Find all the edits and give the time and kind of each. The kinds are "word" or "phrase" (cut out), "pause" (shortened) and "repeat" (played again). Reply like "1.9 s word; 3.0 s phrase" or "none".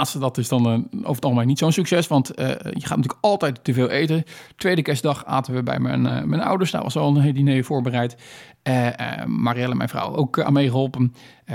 none